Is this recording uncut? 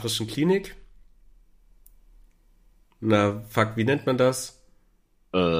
yes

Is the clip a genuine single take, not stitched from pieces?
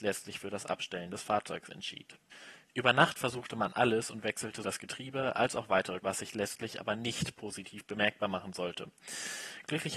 no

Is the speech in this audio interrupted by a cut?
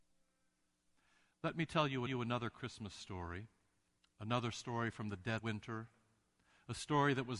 yes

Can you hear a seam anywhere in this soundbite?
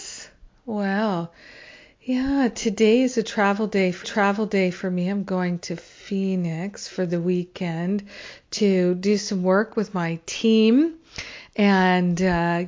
yes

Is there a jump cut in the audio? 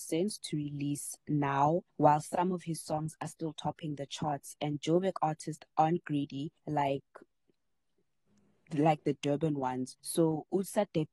yes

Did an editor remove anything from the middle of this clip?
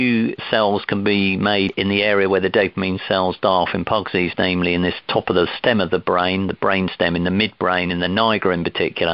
no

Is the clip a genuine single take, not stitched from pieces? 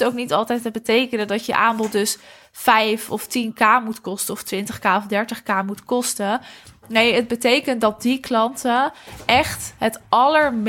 yes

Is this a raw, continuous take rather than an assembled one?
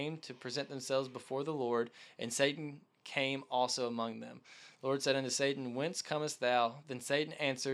yes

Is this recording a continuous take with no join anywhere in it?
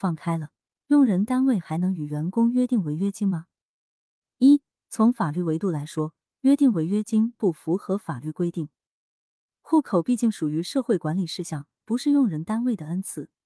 yes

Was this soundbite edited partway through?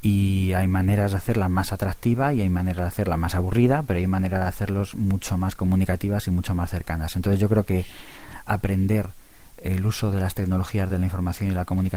no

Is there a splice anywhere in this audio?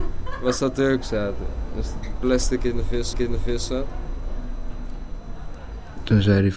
yes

